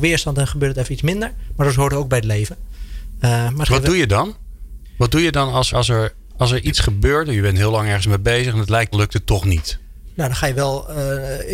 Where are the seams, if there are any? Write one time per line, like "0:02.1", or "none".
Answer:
0:05.7
0:08.9